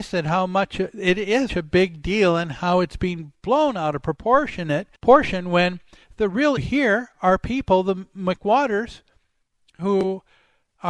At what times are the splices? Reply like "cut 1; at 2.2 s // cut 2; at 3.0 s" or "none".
cut 1; at 1.5 s // cut 2; at 5.0 s // cut 3; at 6.6 s

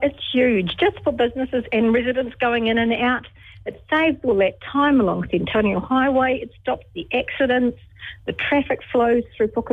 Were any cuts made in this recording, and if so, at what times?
none

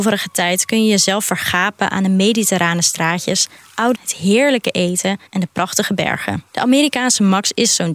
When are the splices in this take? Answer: cut 1; at 3.9 s // cut 2; at 5.3 s // cut 3; at 6.5 s

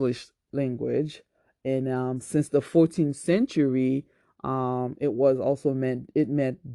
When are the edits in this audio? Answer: none

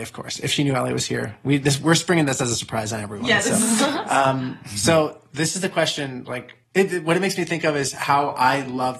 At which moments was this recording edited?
cut 1; at 6.6 s

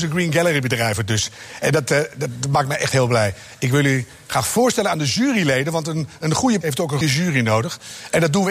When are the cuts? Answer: cut 1; at 6.6 s // cut 2; at 7.0 s

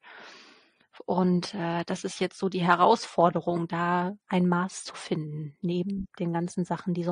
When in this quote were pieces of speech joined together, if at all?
cut 1; at 4.2 s // cut 2; at 6.1 s

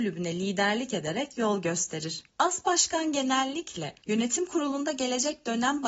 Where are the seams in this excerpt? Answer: cut 1; at 2.3 s // cut 2; at 4.0 s

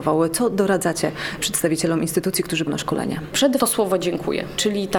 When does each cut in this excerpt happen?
cut 1; at 2.7 s // cut 2; at 3.6 s

